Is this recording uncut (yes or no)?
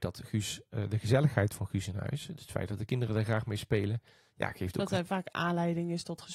yes